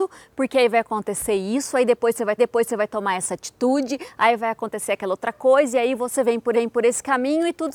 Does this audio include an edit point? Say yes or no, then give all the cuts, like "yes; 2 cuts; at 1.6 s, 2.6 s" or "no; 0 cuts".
yes; 2 cuts; at 2.4 s, 6.5 s